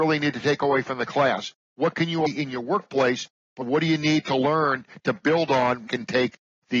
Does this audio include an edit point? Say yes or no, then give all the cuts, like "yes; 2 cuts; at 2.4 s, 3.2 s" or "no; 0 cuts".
yes; 3 cuts; at 2.3 s, 3.6 s, 5.9 s